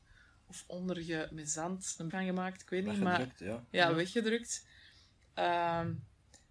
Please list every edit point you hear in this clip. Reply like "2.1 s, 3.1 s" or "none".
2.1 s